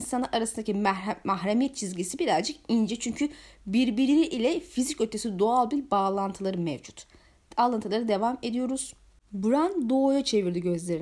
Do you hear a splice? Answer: no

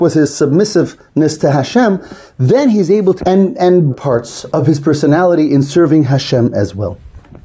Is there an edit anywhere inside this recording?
yes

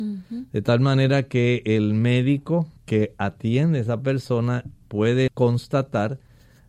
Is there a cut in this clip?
yes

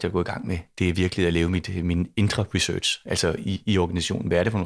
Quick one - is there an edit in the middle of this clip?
no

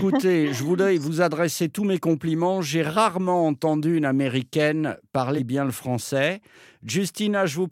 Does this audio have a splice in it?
yes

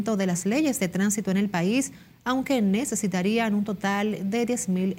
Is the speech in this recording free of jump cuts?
yes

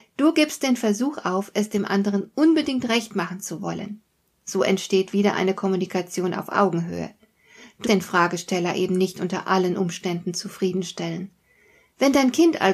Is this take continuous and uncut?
no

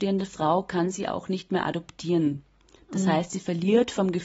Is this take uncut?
yes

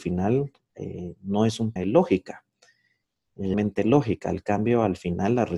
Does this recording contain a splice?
yes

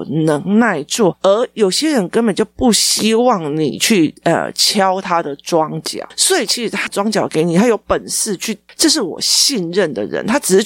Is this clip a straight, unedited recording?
no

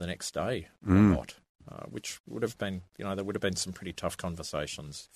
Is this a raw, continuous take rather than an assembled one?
yes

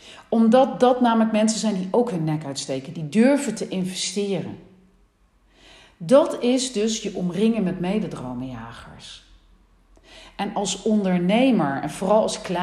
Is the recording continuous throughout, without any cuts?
yes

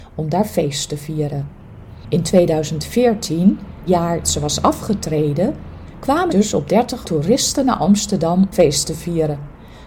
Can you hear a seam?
yes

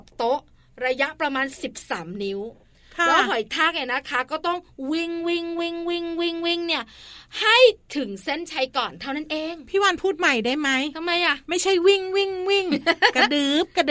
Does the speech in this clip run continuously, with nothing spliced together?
yes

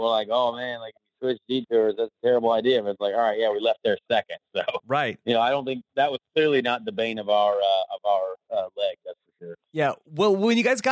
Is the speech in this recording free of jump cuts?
yes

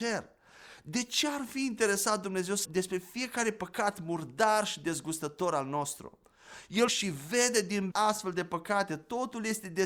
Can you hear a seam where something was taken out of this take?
yes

